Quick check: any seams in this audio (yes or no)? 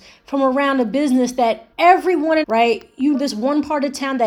yes